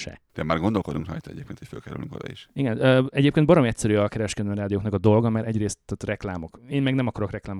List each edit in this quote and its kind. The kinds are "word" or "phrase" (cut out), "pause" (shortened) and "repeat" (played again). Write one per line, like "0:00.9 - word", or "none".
none